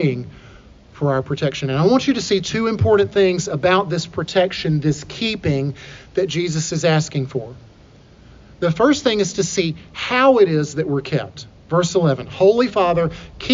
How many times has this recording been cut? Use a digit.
0